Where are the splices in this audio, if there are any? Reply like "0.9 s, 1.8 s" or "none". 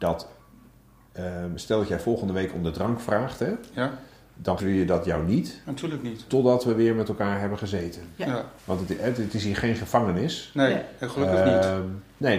4.6 s, 8.6 s